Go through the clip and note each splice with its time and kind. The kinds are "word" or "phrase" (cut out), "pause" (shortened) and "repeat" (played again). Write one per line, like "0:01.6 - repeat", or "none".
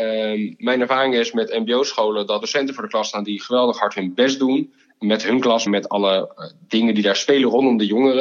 0:02.4 - phrase
0:05.7 - phrase